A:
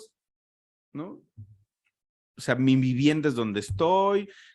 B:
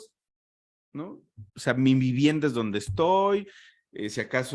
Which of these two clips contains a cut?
B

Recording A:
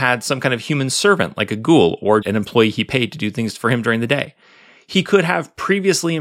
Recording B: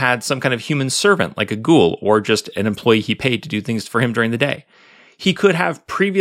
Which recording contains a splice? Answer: A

